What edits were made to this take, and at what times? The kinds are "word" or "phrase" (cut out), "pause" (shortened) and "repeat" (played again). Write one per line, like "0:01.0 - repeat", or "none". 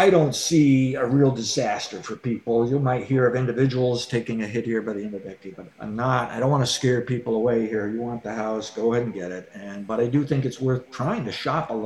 0:05.7 - pause